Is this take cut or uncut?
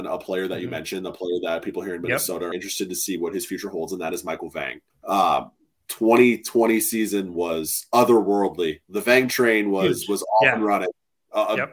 cut